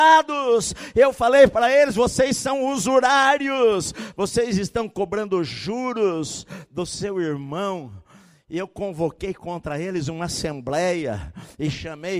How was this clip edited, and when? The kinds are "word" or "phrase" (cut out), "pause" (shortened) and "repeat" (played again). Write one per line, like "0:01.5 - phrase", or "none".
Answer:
none